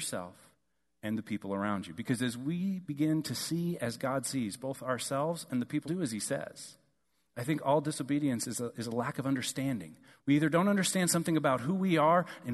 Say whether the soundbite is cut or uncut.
cut